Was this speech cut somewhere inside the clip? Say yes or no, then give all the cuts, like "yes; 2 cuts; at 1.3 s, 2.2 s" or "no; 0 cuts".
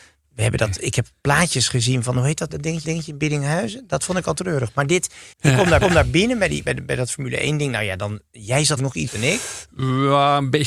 yes; 7 cuts; at 2.5 s, 2.8 s, 5.3 s, 5.8 s, 6.6 s, 8.8 s, 9.1 s